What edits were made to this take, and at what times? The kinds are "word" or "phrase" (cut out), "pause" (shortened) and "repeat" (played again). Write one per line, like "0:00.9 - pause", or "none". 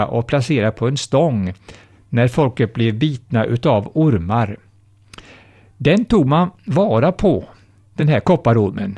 none